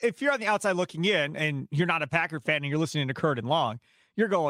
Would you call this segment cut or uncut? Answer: uncut